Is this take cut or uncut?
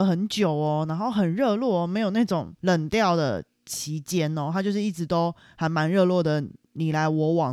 cut